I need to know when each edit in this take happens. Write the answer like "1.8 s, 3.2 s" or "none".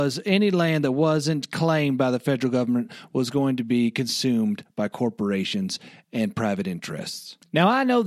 none